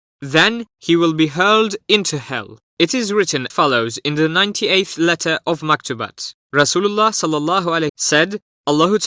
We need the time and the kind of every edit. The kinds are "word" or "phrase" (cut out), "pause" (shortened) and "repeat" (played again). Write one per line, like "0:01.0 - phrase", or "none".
0:02.7 - pause
0:03.5 - word
0:06.4 - pause
0:07.9 - word